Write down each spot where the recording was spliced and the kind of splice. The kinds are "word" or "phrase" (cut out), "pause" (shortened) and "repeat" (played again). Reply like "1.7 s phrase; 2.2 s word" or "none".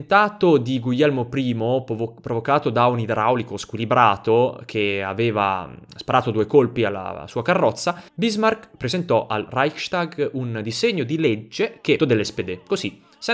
8.1 s pause; 12.0 s phrase

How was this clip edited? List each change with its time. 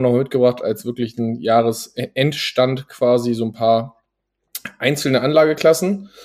none

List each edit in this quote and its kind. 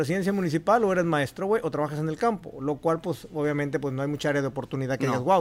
none

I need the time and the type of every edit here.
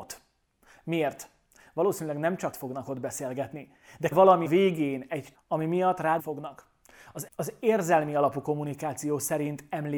2.5 s word; 4.1 s word; 4.5 s word; 5.3 s word; 6.2 s word; 7.3 s word

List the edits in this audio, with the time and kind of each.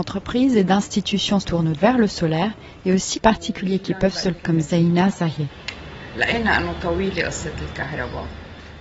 1.4 s word; 1.7 s word; 3.1 s word; 4.4 s word

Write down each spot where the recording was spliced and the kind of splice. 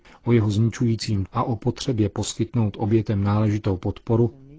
1.2 s word

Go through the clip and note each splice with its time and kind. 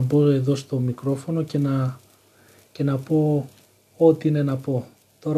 none

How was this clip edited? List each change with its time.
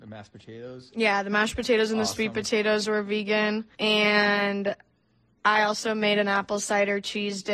none

